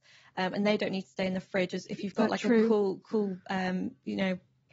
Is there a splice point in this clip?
no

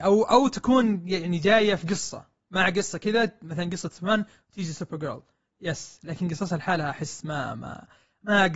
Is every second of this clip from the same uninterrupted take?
yes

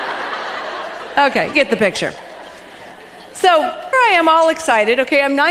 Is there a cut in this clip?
yes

